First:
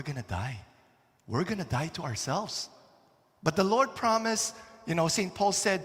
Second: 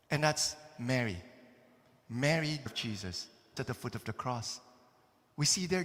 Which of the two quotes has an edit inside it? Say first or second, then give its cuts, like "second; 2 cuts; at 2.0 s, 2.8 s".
second; 2 cuts; at 2.7 s, 3.6 s